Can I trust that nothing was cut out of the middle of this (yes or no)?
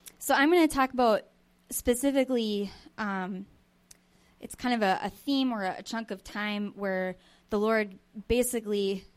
yes